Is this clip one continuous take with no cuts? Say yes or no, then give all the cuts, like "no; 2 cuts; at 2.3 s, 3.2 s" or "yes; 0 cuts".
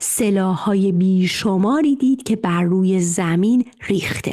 yes; 0 cuts